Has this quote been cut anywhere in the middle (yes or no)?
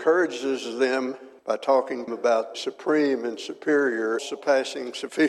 yes